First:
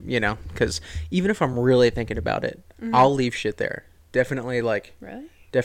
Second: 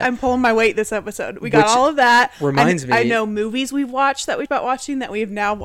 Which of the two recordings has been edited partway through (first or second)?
second